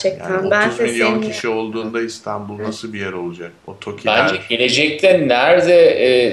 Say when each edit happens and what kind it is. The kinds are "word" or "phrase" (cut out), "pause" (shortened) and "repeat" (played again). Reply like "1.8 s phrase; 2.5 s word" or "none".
3.6 s pause